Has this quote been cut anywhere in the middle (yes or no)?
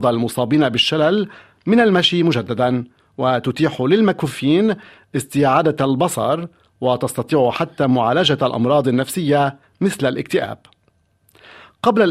no